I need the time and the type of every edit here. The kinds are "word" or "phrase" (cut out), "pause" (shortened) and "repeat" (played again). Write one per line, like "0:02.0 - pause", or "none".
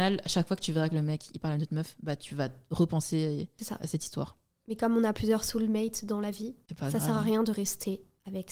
none